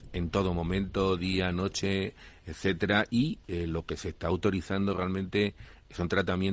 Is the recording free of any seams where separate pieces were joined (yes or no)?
yes